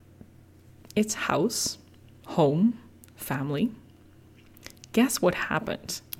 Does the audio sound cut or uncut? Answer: uncut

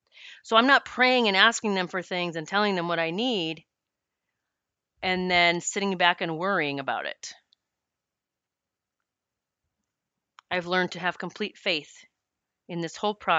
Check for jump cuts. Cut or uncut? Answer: uncut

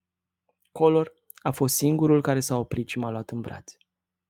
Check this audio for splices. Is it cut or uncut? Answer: uncut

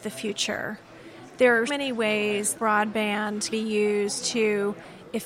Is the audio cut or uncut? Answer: cut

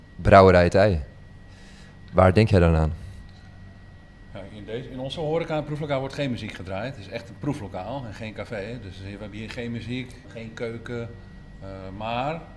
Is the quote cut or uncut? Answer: cut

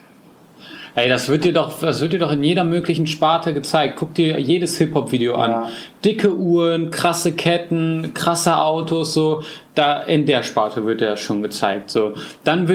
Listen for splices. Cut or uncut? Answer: uncut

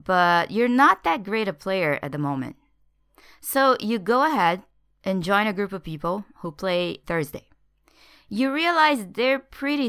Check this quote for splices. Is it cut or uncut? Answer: cut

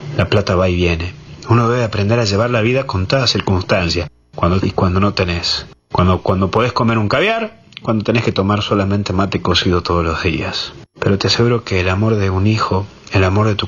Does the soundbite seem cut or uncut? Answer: cut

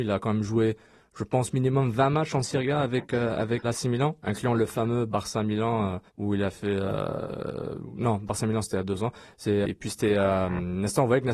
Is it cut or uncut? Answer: cut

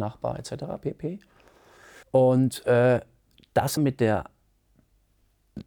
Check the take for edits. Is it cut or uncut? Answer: cut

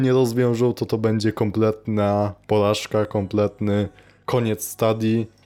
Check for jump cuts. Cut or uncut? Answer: uncut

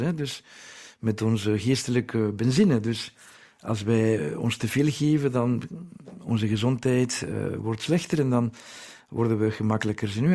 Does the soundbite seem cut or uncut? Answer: uncut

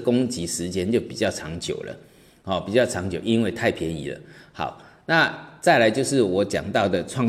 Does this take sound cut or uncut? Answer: uncut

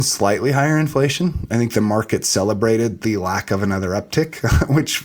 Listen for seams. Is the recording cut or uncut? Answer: uncut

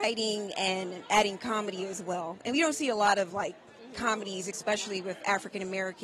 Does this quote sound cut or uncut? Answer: uncut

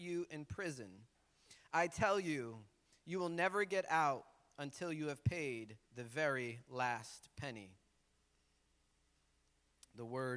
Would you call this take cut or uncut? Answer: cut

